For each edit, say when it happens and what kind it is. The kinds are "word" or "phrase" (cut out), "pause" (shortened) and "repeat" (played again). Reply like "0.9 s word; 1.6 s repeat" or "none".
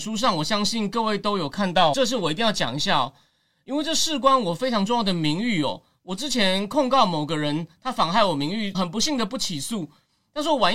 1.9 s word; 8.7 s word